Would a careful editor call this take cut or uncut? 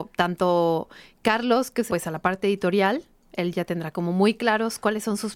cut